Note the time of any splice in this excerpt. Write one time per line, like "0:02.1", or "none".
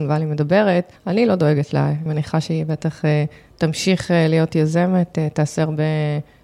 0:01.0
0:02.1